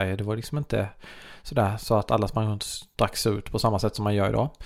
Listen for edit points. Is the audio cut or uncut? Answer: uncut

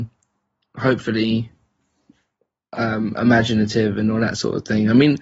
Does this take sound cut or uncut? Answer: uncut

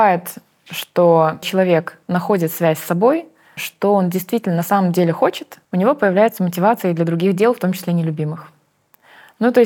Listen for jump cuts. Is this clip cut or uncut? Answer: cut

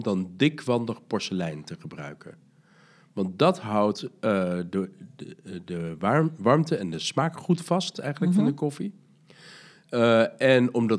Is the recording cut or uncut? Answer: uncut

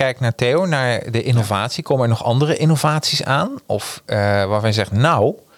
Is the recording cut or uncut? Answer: uncut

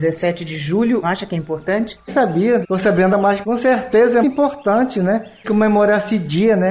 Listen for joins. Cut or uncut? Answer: cut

